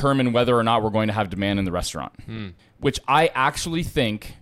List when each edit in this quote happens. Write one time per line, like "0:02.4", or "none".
0:02.6